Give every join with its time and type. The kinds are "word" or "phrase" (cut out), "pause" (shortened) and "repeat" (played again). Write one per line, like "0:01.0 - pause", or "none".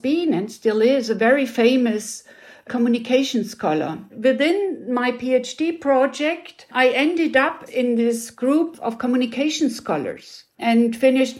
none